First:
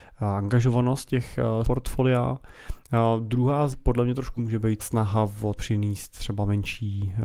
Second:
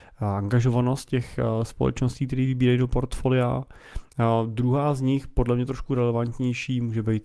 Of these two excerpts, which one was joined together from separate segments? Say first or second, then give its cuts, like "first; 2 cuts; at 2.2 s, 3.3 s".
first; 5 cuts; at 1.6 s, 3.7 s, 4.4 s, 4.8 s, 5.6 s